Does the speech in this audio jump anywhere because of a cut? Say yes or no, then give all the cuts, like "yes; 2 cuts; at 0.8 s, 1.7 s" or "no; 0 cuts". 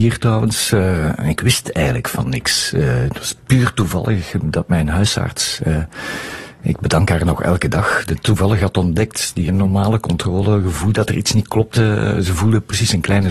yes; 2 cuts; at 3.4 s, 9.5 s